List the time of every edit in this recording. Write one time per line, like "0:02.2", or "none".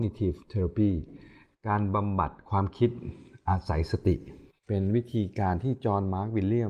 0:04.5